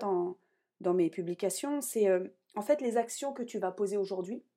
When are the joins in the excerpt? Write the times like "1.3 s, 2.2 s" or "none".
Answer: none